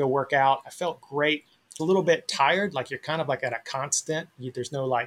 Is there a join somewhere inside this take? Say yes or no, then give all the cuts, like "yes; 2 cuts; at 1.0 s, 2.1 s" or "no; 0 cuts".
yes; 1 cut; at 1.8 s